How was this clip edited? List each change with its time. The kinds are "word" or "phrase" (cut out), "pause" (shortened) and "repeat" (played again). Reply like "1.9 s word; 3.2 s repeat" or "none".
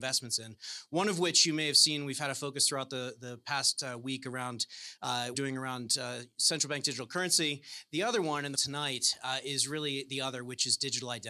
5.3 s phrase; 8.5 s phrase